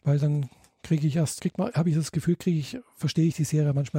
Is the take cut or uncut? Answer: cut